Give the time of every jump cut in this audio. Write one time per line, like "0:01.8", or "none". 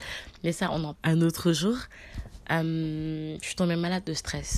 0:00.9